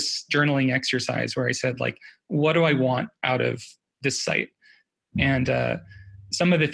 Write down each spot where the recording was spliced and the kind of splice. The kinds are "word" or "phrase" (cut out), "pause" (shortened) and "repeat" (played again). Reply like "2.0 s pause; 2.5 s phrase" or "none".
none